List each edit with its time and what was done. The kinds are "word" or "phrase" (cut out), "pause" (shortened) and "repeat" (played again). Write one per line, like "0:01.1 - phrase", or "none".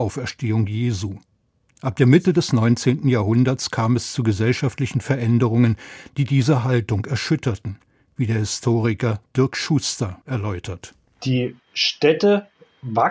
none